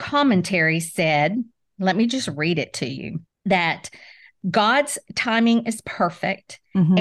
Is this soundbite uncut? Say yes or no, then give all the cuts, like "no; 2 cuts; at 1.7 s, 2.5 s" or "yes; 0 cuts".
no; 1 cut; at 3.3 s